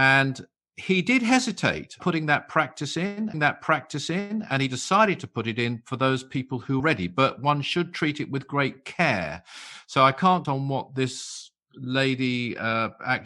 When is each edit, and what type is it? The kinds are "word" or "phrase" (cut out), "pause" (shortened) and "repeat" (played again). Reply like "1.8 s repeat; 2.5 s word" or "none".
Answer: 2.0 s word; 3.3 s repeat; 6.8 s word; 10.4 s word